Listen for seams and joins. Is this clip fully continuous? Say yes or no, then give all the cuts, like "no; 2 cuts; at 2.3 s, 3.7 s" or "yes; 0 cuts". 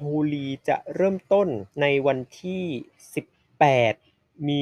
no; 2 cuts; at 1.7 s, 3.3 s